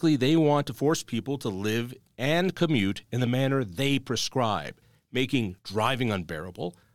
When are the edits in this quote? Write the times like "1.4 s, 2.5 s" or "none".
none